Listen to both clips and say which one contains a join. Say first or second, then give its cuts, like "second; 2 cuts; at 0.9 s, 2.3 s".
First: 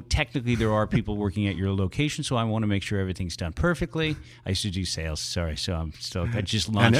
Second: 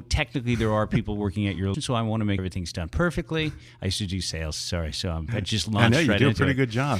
second; 3 cuts; at 1.7 s, 2.4 s, 5.3 s